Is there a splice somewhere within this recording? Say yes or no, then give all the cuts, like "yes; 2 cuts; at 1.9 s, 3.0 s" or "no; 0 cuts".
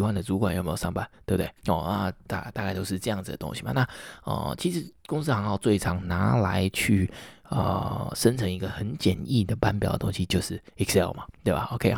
yes; 2 cuts; at 1.6 s, 10.7 s